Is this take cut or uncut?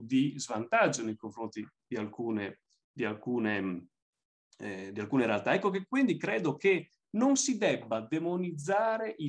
uncut